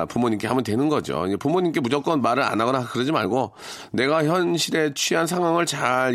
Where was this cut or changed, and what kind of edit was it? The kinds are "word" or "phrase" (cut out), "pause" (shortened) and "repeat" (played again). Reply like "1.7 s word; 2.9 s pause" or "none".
none